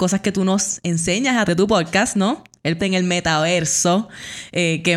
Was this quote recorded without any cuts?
no; 2 cuts; at 1.5 s, 2.8 s

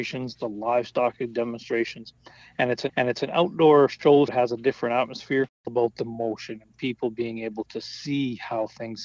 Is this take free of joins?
no; 3 cuts; at 2.9 s, 4.3 s, 5.7 s

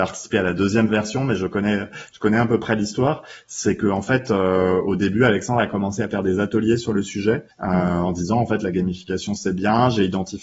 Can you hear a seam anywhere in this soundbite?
yes; 1 cut; at 7.5 s

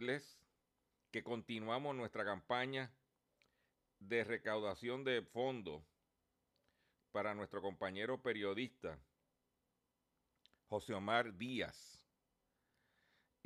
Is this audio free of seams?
yes; 0 cuts

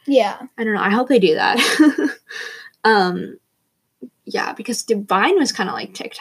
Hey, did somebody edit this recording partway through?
yes; 1 cut; at 4.1 s

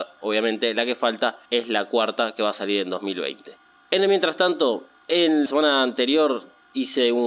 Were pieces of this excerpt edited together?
yes; 2 cuts; at 1.5 s, 5.5 s

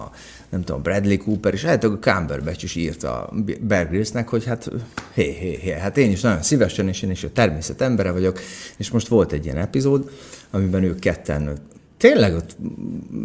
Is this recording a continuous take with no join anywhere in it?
yes; 0 cuts

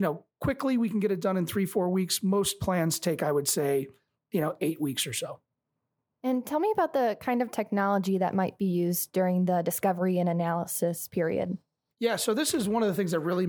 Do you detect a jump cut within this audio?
no; 0 cuts

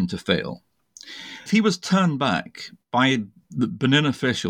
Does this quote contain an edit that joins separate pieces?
yes; 1 cut; at 1.5 s

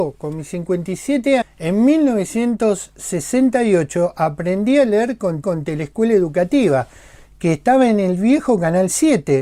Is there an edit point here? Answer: yes; 2 cuts; at 1.4 s, 5.4 s

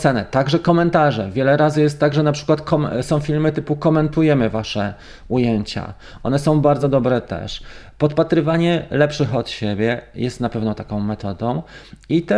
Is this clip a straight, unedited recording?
yes; 0 cuts

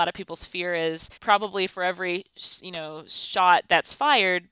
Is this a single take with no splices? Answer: no; 1 cut; at 1.2 s

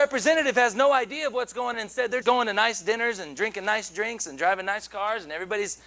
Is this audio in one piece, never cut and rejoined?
no; 2 cuts; at 1.7 s, 2.2 s

